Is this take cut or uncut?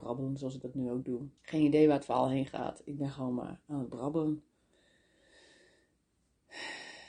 cut